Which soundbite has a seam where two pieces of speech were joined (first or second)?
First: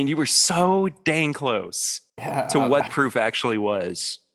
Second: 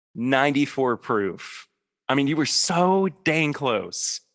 first